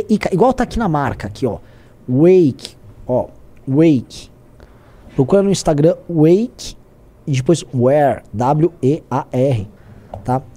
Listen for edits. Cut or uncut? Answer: uncut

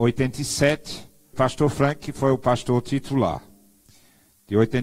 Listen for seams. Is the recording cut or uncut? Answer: cut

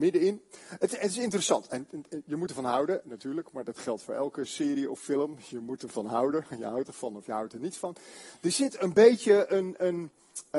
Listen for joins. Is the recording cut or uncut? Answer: uncut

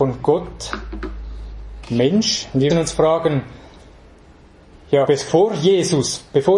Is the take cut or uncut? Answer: cut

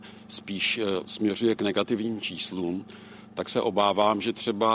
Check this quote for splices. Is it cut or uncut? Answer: uncut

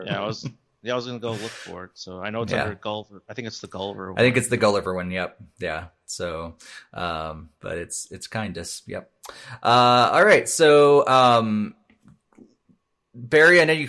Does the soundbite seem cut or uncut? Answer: uncut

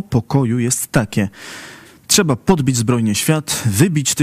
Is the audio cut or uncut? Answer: uncut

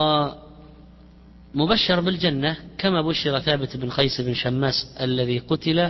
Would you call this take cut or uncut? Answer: uncut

